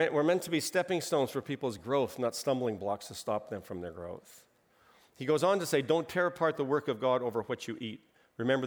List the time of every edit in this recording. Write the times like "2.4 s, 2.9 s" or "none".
none